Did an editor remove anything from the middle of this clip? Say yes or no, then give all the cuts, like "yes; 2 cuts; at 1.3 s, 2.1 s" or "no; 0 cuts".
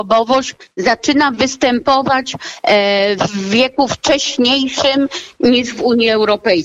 no; 0 cuts